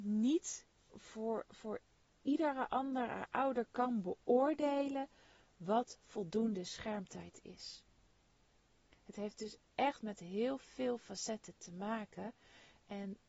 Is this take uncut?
yes; 0 cuts

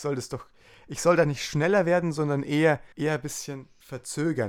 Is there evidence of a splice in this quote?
yes; 1 cut; at 2.9 s

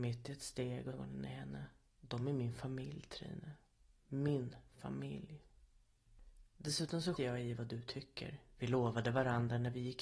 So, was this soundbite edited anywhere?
yes; 3 cuts; at 0.9 s, 1.9 s, 7.2 s

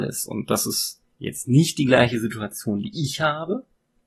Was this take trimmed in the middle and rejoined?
yes; 1 cut; at 1.1 s

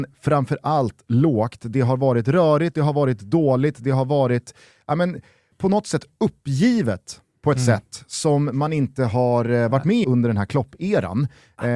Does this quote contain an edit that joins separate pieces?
yes; 2 cuts; at 5.5 s, 10.0 s

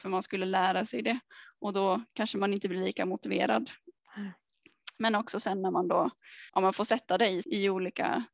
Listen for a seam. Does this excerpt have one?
yes; 2 cuts; at 6.5 s, 7.4 s

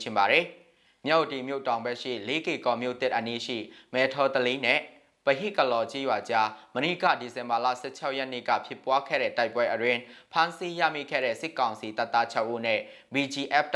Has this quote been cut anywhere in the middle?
no; 0 cuts

